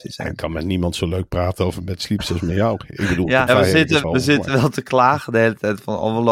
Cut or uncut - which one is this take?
cut